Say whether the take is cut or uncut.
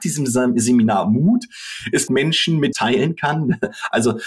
cut